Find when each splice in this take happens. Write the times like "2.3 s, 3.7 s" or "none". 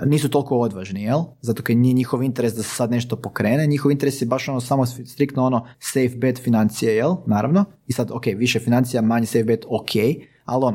5.7 s